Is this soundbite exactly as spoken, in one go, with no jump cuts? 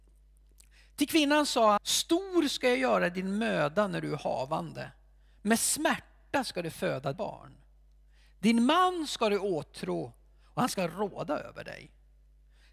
no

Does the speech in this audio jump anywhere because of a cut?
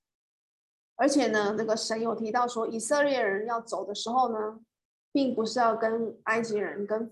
no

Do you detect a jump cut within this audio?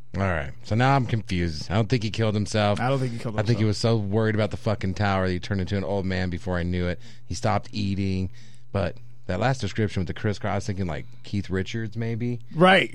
no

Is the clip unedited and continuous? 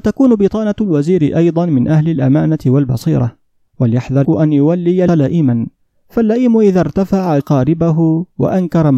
no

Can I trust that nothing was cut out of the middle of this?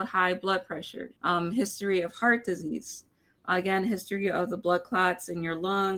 no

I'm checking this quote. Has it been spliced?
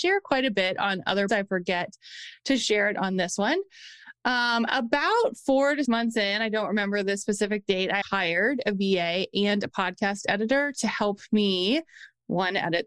yes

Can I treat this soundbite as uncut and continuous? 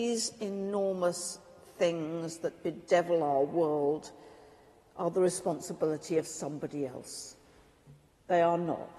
yes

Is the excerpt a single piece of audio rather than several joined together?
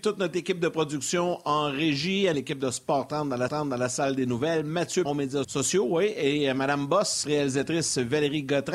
no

